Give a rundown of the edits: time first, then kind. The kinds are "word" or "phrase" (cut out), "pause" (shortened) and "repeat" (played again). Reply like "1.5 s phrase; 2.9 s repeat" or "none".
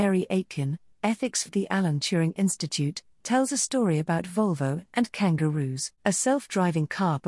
1.5 s word; 6.0 s pause